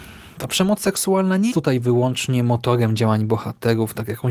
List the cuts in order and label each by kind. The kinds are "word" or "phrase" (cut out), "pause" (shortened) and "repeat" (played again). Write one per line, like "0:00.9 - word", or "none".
0:01.5 - word